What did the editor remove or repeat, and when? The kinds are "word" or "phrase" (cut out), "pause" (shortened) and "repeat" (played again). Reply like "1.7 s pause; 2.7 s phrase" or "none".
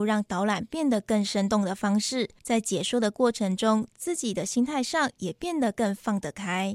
2.4 s pause